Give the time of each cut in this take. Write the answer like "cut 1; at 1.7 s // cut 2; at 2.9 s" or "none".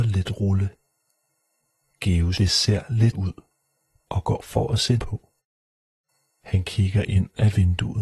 cut 1; at 2.3 s // cut 2; at 3.1 s // cut 3; at 4.4 s // cut 4; at 5.0 s